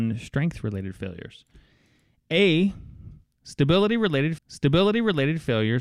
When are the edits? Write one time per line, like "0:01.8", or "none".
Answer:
0:04.4